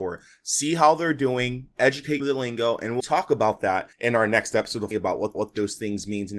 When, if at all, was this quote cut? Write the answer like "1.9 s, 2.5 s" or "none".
2.2 s, 3.0 s, 3.9 s, 4.9 s, 5.3 s